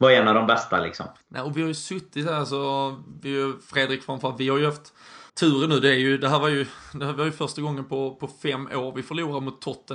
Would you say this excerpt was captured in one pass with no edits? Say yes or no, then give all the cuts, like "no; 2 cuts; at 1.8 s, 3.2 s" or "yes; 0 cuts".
no; 2 cuts; at 1.2 s, 5.3 s